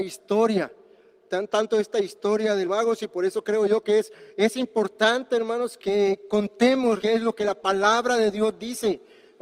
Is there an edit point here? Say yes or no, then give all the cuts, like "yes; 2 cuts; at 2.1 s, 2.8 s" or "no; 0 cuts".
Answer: yes; 3 cuts; at 2.6 s, 5.8 s, 7.0 s